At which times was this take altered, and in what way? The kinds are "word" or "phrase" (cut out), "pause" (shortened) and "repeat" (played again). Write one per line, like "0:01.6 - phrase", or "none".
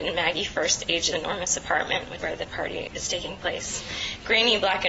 0:01.1 - word
0:02.2 - word